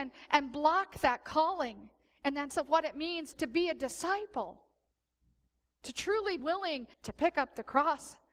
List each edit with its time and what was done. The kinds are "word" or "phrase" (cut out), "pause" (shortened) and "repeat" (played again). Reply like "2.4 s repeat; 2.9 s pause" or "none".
2.5 s word; 3.3 s word; 6.4 s word; 6.9 s pause